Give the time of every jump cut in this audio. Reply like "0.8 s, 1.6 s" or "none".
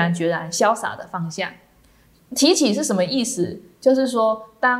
none